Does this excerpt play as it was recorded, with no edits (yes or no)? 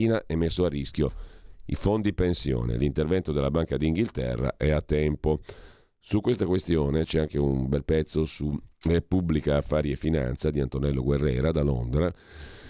yes